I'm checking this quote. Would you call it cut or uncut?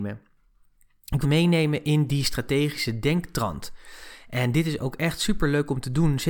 cut